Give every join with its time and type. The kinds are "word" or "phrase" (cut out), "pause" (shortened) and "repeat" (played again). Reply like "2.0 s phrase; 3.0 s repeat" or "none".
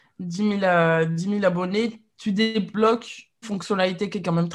3.4 s word